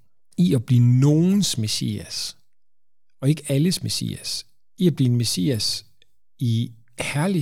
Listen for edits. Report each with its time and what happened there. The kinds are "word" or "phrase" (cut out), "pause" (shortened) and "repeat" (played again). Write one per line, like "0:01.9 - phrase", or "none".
none